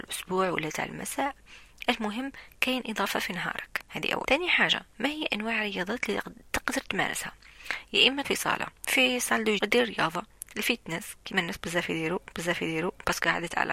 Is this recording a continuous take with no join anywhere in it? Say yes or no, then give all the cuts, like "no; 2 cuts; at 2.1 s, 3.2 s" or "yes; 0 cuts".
no; 5 cuts; at 4.2 s, 8.2 s, 8.8 s, 9.6 s, 12.3 s